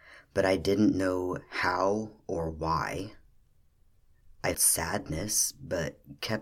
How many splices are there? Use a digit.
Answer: 1